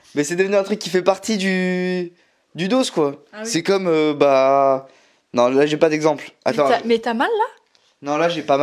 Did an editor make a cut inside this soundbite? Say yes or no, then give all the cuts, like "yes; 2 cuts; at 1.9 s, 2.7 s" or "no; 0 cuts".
no; 0 cuts